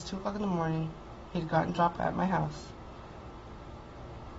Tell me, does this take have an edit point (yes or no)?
yes